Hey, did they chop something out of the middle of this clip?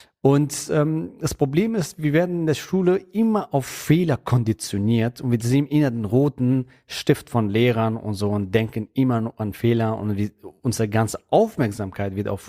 no; 0 cuts

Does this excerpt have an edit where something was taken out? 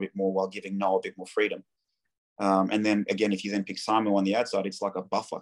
no; 0 cuts

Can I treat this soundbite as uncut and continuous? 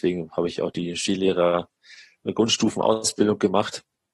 yes; 0 cuts

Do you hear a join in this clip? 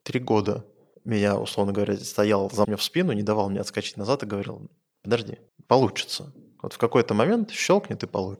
yes; 3 cuts; at 0.9 s, 2.6 s, 5.5 s

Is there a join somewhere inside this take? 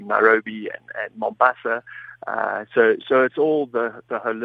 no; 0 cuts

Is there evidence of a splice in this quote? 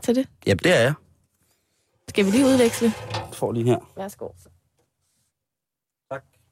no; 0 cuts

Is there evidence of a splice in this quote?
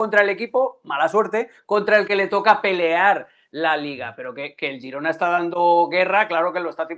no; 0 cuts

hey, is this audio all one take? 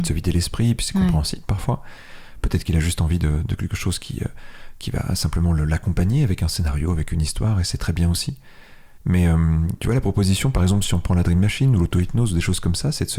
no; 1 cut; at 9.0 s

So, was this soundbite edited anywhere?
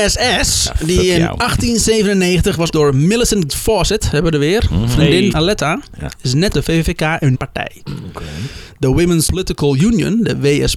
yes; 6 cuts; at 2.7 s, 3.5 s, 5.3 s, 6.5 s, 7.3 s, 9.3 s

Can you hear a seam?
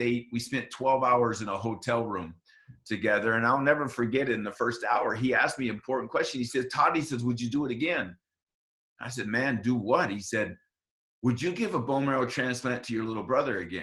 no; 0 cuts

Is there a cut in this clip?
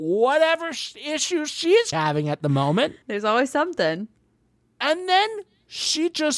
yes; 2 cuts; at 1.9 s, 3.0 s

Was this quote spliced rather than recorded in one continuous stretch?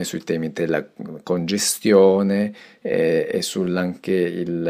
no; 0 cuts

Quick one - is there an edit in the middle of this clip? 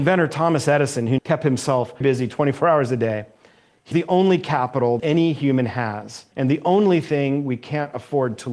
yes; 5 cuts; at 1.2 s, 2.0 s, 3.9 s, 5.0 s, 6.3 s

